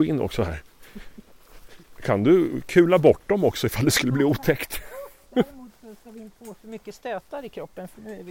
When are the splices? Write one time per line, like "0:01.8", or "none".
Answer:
0:06.4